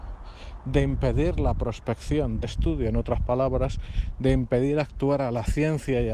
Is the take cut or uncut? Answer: cut